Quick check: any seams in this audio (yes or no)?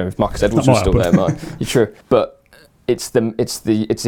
yes